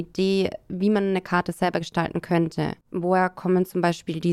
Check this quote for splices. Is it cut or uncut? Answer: cut